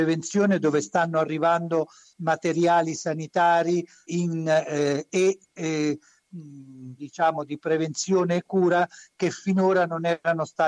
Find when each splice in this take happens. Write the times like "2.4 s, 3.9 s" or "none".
4.1 s, 7.0 s